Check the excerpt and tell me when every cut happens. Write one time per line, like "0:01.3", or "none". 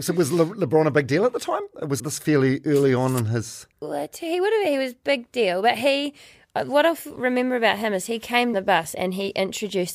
0:02.0
0:03.7
0:08.5

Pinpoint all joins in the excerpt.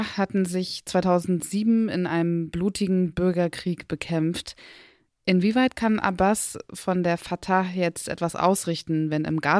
none

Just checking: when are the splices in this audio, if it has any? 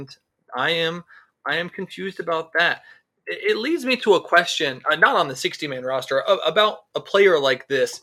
none

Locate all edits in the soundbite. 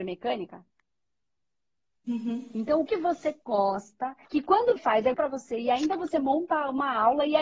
0:02.9
0:04.2
0:04.8
0:05.1

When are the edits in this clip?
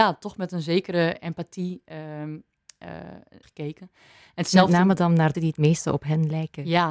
0:03.4
0:05.3

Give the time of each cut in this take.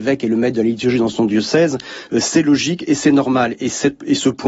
none

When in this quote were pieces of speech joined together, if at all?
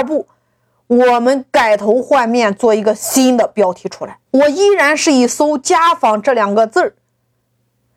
0:04.3

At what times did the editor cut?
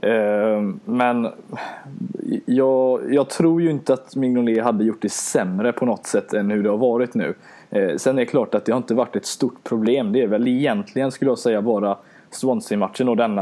none

